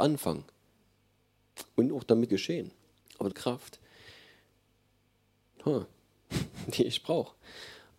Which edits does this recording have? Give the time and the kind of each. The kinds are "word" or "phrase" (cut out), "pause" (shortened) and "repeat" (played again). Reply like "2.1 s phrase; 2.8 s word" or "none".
2.3 s word; 3.0 s pause; 3.3 s phrase